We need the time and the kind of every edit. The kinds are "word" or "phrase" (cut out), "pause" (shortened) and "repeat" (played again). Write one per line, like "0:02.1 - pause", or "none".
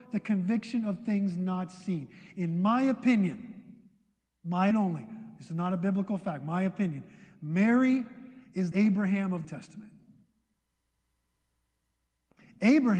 0:04.7 - word
0:08.7 - word
0:09.4 - phrase